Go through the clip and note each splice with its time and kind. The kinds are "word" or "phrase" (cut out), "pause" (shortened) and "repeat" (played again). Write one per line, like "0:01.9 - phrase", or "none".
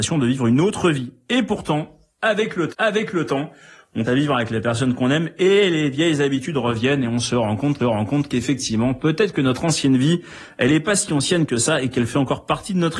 0:02.7 - repeat
0:04.1 - word
0:07.8 - repeat

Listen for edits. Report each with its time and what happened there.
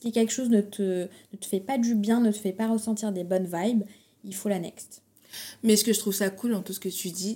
none

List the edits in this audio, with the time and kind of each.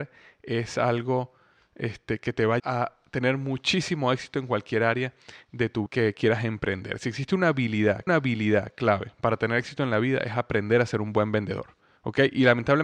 0:02.6 - word
0:05.9 - word
0:08.1 - repeat

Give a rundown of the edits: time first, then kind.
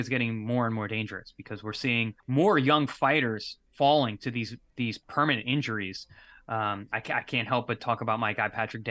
0:02.2 - pause
0:03.7 - pause

